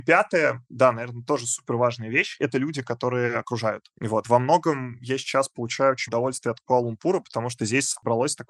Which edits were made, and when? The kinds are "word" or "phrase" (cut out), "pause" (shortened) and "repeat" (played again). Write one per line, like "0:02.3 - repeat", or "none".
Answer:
0:06.1 - word